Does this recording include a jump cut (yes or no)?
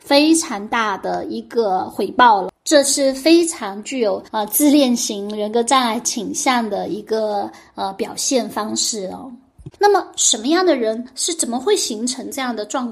yes